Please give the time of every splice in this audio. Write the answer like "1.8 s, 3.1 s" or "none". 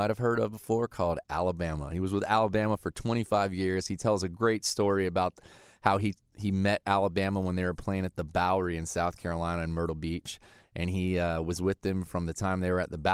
none